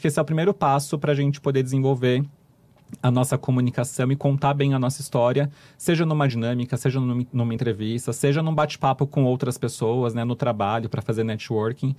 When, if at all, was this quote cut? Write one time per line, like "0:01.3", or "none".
none